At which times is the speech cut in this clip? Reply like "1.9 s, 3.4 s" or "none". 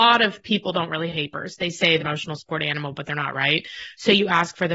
1.1 s, 2.0 s, 3.3 s